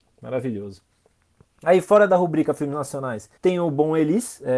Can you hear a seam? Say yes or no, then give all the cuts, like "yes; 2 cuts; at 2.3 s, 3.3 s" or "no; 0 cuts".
yes; 1 cut; at 3.4 s